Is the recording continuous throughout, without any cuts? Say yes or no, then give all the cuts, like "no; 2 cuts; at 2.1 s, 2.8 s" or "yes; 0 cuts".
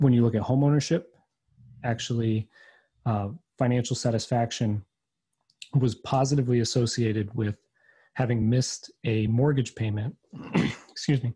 yes; 0 cuts